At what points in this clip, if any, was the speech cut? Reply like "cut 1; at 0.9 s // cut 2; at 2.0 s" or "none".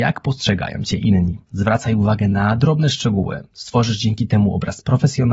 cut 1; at 1.4 s

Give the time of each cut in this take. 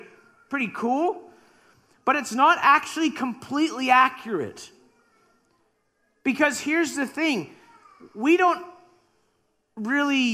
none

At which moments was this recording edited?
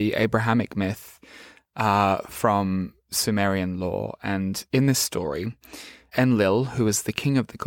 cut 1; at 6.1 s

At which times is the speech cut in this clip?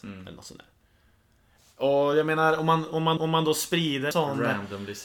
cut 1; at 3.2 s // cut 2; at 4.1 s

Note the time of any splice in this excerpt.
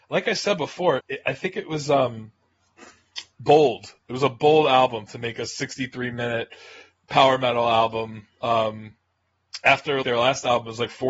cut 1; at 1.0 s // cut 2; at 10.0 s

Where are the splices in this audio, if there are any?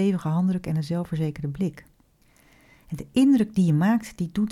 none

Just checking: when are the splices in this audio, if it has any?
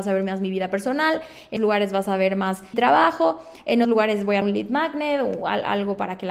cut 1; at 1.6 s // cut 2; at 2.7 s // cut 3; at 3.8 s // cut 4; at 4.4 s

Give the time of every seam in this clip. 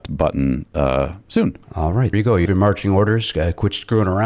cut 1; at 1.6 s // cut 2; at 2.1 s // cut 3; at 2.5 s

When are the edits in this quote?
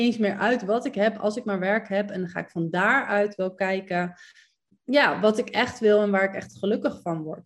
none

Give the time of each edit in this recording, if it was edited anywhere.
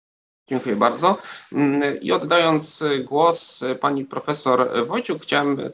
none

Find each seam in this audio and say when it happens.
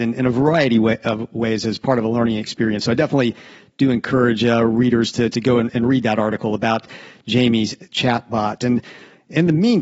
none

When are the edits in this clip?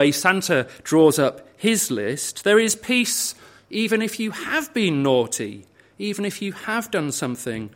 none

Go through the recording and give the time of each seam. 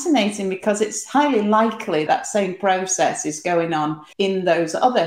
cut 1; at 2.1 s // cut 2; at 4.1 s

